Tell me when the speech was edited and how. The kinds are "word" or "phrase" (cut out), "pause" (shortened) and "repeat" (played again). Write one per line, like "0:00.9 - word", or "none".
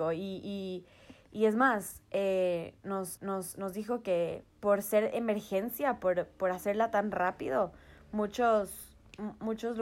0:03.2 - repeat
0:04.5 - pause